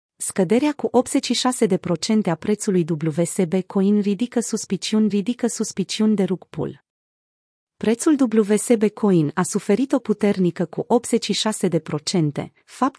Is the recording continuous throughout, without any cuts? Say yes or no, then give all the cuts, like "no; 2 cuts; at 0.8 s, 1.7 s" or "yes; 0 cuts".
no; 2 cuts; at 5.1 s, 10.0 s